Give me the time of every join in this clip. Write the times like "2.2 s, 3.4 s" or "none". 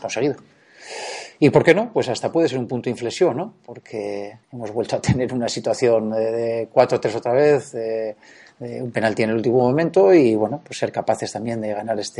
4.4 s